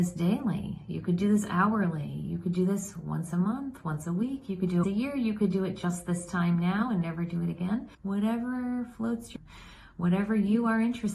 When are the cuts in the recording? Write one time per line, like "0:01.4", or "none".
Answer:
0:04.8
0:07.9
0:09.4